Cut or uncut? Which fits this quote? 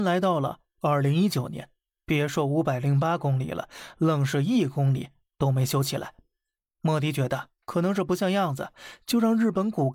uncut